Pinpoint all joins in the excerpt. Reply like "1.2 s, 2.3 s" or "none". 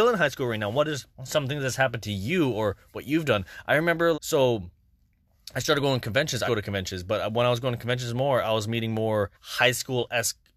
1.1 s, 4.1 s, 6.5 s, 9.3 s